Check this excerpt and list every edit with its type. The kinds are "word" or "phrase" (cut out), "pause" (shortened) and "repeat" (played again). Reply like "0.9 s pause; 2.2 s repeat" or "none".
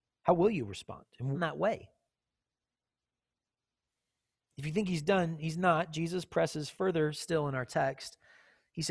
1.3 s phrase